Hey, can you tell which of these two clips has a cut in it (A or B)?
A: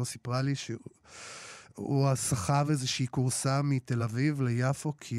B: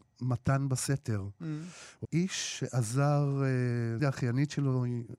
B